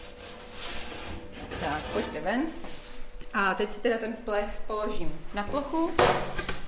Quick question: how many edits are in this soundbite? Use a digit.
0